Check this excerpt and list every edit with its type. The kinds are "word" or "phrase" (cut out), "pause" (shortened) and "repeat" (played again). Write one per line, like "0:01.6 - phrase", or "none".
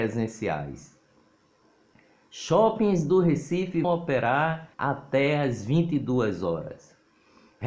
0:03.8 - word
0:04.7 - pause